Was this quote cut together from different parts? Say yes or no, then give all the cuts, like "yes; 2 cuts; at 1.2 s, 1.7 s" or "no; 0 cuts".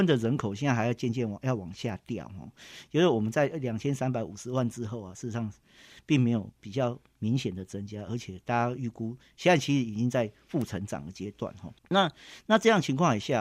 yes; 1 cut; at 11.8 s